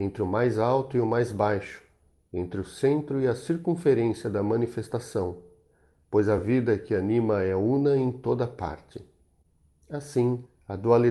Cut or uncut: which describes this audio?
uncut